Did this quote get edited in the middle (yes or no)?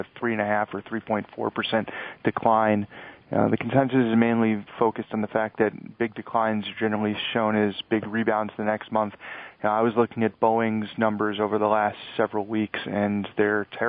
no